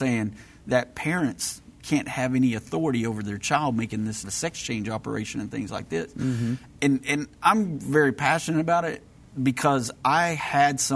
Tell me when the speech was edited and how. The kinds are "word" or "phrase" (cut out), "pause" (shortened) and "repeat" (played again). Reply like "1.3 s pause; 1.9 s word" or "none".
4.2 s phrase